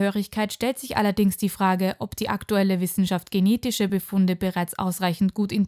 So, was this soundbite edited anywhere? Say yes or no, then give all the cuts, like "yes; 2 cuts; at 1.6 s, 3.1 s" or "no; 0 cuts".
no; 0 cuts